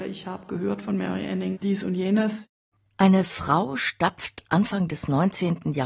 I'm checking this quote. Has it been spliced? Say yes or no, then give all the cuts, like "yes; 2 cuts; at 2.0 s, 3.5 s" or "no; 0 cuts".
no; 0 cuts